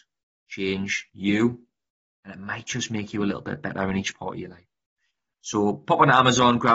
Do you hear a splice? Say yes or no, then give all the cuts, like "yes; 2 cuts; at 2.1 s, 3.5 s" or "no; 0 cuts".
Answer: no; 0 cuts